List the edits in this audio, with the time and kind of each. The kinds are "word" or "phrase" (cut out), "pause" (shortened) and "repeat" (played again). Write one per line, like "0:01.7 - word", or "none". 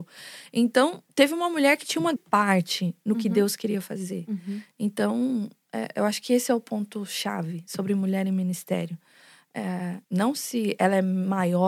0:01.1 - pause
0:02.2 - word
0:10.0 - pause